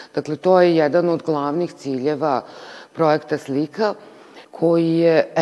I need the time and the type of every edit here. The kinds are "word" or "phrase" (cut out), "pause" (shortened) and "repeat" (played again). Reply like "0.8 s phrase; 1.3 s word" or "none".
4.4 s pause